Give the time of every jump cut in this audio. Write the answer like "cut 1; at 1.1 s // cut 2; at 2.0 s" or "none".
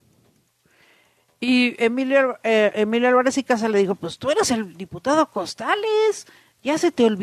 none